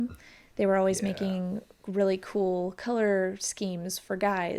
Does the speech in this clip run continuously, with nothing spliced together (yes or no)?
yes